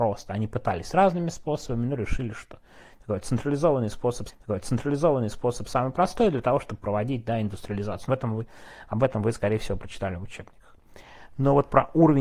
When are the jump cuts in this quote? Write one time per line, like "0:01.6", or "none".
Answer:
0:04.3
0:08.1